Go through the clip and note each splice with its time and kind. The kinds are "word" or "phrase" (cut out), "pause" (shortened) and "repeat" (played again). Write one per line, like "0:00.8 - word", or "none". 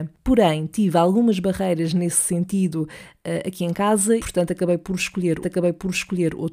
0:04.2 - word
0:05.4 - repeat